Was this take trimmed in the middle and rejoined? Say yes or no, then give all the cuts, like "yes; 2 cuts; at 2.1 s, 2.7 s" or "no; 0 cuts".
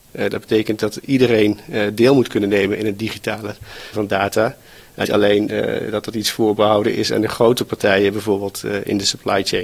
yes; 2 cuts; at 3.9 s, 5.0 s